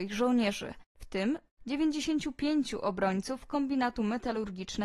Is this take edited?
no; 0 cuts

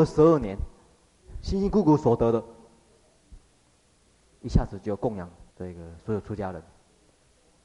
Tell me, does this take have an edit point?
yes; 1 cut; at 5.5 s

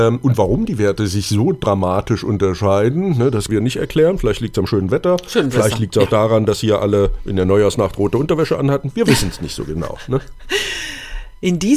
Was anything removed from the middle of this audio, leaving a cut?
yes; 1 cut; at 3.5 s

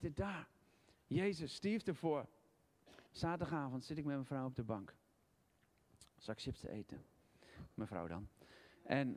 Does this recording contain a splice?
yes; 1 cut; at 3.1 s

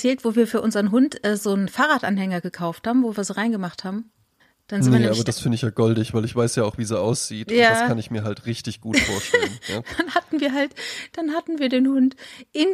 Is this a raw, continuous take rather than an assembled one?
no; 1 cut; at 4.4 s

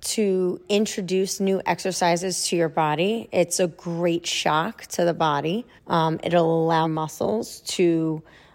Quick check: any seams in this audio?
yes; 2 cuts; at 5.8 s, 6.8 s

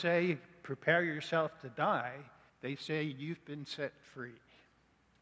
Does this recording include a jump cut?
yes; 1 cut; at 2.5 s

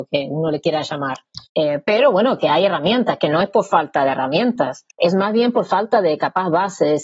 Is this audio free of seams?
no; 2 cuts; at 1.5 s, 4.9 s

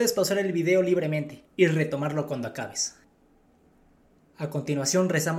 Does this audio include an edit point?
no; 0 cuts

